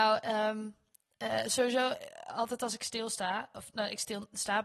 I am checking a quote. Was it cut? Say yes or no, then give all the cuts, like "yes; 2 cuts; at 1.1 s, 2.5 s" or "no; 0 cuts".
no; 0 cuts